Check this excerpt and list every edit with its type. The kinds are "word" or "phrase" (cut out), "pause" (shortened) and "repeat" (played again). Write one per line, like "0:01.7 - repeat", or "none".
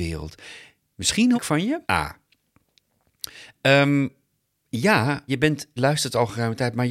0:01.3 - word
0:01.8 - pause
0:05.3 - phrase
0:05.8 - word